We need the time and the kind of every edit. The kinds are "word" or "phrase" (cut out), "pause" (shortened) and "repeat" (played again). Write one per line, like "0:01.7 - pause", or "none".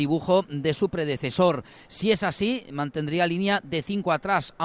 none